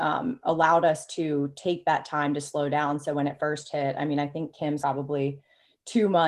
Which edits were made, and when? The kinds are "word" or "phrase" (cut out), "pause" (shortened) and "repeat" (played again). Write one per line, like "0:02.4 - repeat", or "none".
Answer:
0:04.8 - word